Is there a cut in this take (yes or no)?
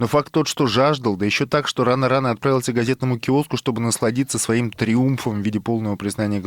no